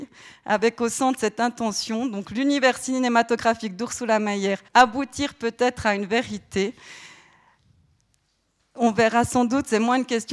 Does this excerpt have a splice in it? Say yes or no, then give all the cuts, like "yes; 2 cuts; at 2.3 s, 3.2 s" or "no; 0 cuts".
yes; 1 cut; at 4.7 s